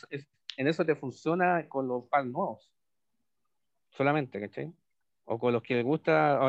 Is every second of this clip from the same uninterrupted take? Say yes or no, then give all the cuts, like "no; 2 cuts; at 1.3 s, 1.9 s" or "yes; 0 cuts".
yes; 0 cuts